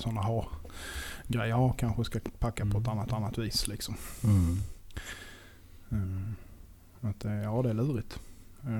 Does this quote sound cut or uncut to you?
cut